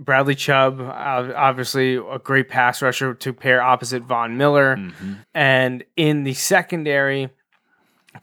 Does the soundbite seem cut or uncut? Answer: cut